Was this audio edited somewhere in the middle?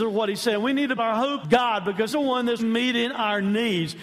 yes; 4 cuts; at 1.0 s, 1.4 s, 2.1 s, 2.6 s

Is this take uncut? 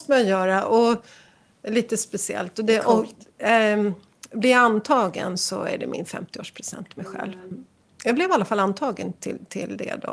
yes; 0 cuts

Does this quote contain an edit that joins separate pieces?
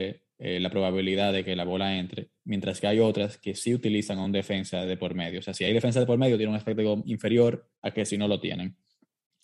no; 0 cuts

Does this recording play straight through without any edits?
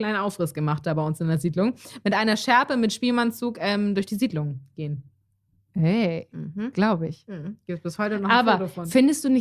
yes; 0 cuts

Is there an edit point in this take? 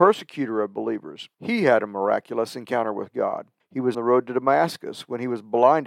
yes; 3 cuts; at 1.3 s, 3.6 s, 3.9 s

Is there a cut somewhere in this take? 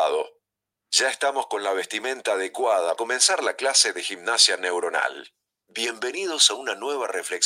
yes; 1 cut; at 3.0 s

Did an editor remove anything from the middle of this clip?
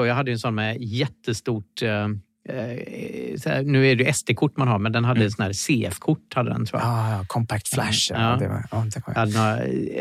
no; 0 cuts

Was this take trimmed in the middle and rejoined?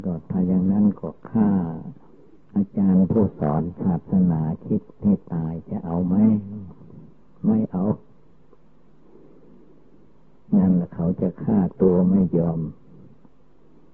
yes; 1 cut; at 2.3 s

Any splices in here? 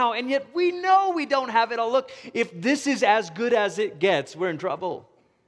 no; 0 cuts

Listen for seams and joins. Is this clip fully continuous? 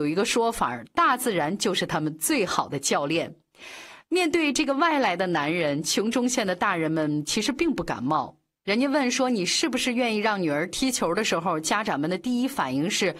yes; 0 cuts

